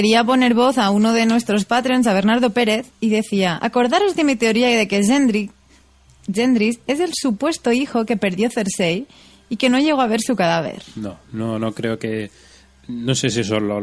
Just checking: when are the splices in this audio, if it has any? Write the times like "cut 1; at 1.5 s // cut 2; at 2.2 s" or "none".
none